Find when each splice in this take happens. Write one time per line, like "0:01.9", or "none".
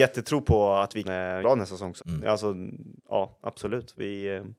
0:01.0
0:01.4
0:02.0
0:03.0